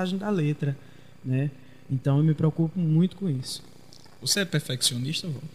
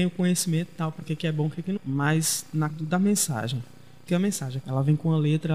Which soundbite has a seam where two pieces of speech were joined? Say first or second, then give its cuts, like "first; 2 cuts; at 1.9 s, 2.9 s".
second; 5 cuts; at 1.0 s, 1.8 s, 2.7 s, 4.1 s, 4.6 s